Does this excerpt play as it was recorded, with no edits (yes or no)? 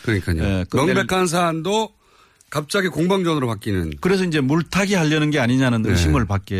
yes